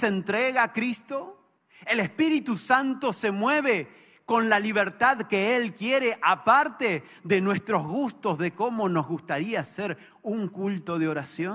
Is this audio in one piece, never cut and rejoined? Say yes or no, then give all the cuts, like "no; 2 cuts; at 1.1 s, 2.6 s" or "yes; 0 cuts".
yes; 0 cuts